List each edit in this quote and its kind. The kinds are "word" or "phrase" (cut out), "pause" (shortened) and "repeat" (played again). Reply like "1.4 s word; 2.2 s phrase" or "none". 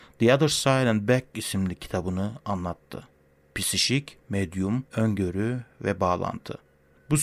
3.5 s word; 4.9 s pause